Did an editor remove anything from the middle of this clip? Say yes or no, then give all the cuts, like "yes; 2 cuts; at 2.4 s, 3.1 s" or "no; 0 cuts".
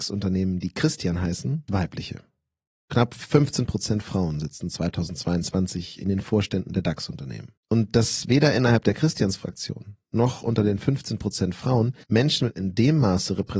yes; 4 cuts; at 1.7 s, 7.6 s, 12.0 s, 12.5 s